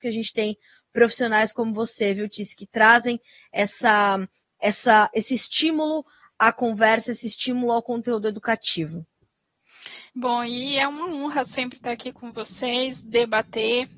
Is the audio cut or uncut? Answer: cut